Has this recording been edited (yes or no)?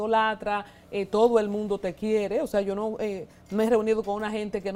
no